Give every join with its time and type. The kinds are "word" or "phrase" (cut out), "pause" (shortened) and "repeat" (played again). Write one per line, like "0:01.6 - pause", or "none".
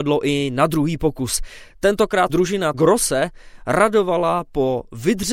0:02.3 - word
0:02.7 - word